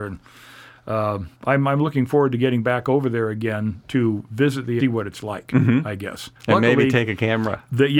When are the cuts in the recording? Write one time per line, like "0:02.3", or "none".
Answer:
0:01.3
0:04.8
0:06.4